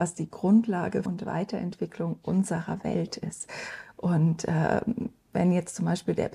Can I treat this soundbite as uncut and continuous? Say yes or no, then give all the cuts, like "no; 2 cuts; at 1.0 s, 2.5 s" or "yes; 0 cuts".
no; 1 cut; at 1.1 s